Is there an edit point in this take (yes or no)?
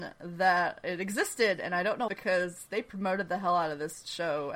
yes